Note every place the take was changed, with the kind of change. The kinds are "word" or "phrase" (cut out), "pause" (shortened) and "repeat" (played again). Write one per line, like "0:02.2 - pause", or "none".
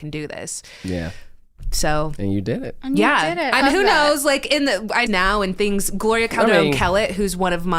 0:03.6 - word
0:05.1 - phrase